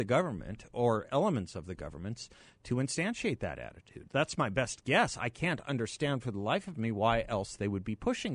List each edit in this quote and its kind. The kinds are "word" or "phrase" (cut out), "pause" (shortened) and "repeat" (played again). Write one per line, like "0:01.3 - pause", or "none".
none